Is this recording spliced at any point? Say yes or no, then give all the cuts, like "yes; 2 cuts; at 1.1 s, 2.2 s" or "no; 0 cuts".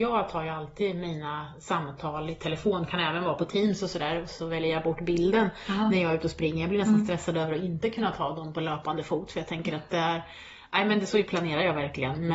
yes; 1 cut; at 11.1 s